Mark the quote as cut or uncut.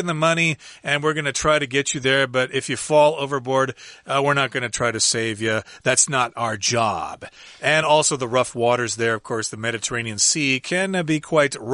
uncut